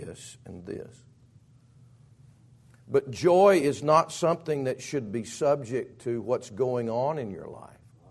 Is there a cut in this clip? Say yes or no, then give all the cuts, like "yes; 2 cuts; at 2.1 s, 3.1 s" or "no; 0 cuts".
no; 0 cuts